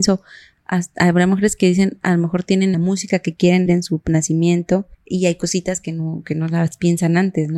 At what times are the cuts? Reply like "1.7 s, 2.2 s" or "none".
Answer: 2.7 s, 3.7 s, 4.9 s